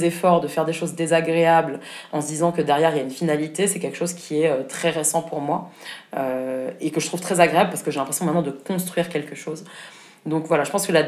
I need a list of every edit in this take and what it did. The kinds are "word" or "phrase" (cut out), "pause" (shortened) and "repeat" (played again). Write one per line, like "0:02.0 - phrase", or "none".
none